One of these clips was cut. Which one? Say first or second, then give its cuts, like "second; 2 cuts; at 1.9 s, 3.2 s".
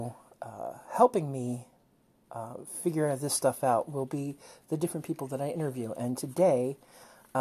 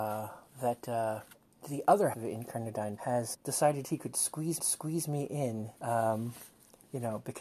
second; 5 cuts; at 2.1 s, 3.0 s, 3.3 s, 4.6 s, 5.8 s